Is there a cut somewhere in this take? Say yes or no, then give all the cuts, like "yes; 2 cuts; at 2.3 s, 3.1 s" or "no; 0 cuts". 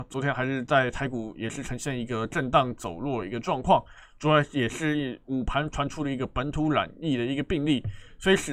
no; 0 cuts